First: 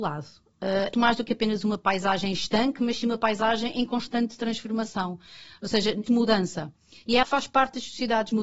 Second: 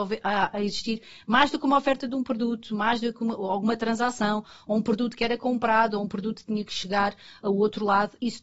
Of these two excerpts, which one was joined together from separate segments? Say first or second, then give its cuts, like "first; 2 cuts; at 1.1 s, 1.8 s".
first; 3 cuts; at 0.9 s, 6.1 s, 7.2 s